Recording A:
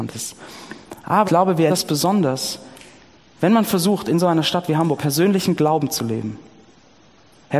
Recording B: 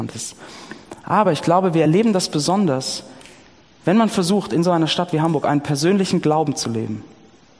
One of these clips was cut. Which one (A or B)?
A